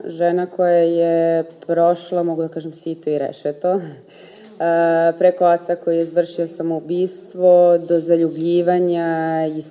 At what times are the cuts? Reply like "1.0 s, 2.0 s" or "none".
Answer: none